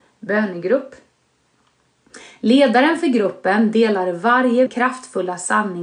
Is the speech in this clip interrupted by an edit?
yes; 1 cut; at 4.7 s

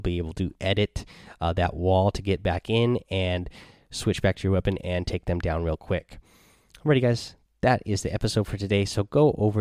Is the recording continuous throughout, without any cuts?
yes; 0 cuts

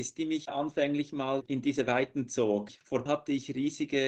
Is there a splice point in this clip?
yes; 1 cut; at 3.1 s

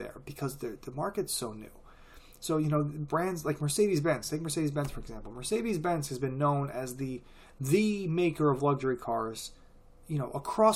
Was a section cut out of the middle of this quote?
no; 0 cuts

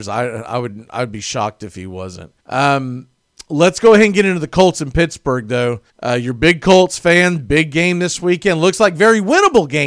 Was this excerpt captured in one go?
no; 2 cuts; at 2.4 s, 5.9 s

